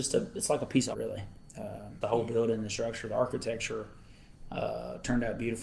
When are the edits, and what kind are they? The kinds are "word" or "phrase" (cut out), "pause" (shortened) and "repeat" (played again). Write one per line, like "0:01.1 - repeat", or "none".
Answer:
0:00.9 - word
0:02.0 - word